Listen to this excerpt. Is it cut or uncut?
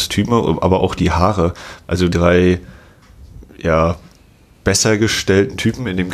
cut